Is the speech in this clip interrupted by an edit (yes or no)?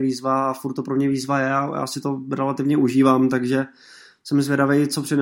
no